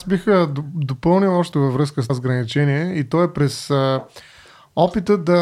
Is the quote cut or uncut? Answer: cut